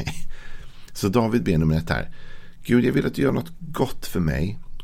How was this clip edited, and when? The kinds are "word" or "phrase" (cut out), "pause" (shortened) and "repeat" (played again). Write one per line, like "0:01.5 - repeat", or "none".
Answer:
none